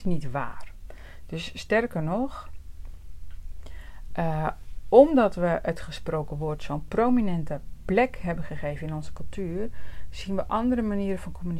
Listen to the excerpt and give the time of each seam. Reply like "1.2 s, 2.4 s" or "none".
none